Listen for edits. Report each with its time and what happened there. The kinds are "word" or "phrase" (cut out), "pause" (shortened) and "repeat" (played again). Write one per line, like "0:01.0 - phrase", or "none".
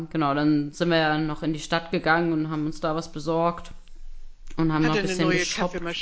none